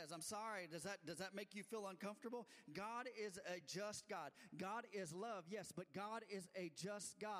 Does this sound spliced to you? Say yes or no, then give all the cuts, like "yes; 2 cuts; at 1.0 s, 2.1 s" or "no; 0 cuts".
no; 0 cuts